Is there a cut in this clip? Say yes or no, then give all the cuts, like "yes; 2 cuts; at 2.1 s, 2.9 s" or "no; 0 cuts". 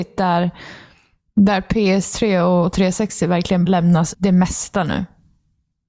yes; 2 cuts; at 3.7 s, 4.1 s